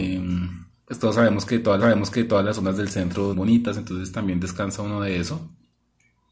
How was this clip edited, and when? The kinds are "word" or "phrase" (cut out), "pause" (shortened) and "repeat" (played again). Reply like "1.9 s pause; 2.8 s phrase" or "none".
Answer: 1.8 s repeat; 3.3 s phrase